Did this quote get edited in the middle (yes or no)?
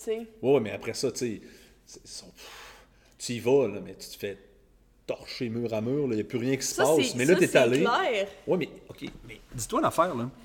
no